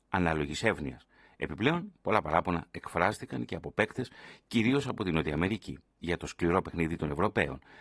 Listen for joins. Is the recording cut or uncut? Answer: uncut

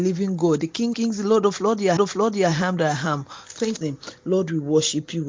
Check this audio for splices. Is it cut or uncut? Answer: cut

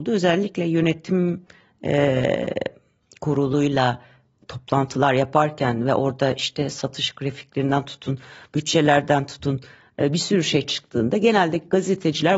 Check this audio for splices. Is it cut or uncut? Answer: uncut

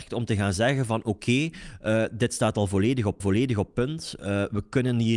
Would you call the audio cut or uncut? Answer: cut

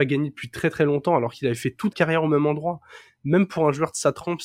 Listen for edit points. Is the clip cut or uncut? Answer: cut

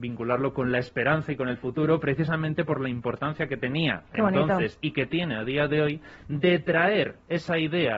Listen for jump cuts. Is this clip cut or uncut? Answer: uncut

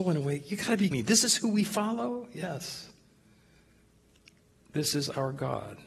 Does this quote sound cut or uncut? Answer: cut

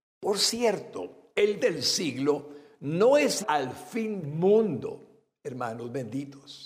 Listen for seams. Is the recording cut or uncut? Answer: cut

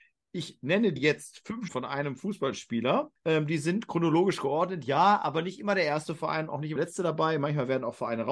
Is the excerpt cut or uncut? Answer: cut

